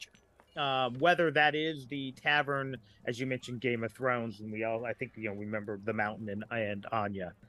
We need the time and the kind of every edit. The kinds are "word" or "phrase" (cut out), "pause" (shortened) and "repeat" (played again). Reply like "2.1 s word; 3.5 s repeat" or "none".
none